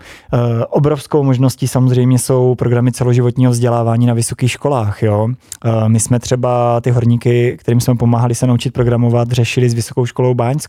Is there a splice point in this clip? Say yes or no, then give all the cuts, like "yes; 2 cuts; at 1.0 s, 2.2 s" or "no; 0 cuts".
no; 0 cuts